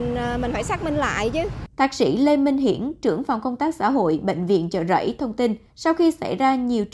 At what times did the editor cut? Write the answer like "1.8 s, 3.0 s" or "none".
1.7 s, 5.7 s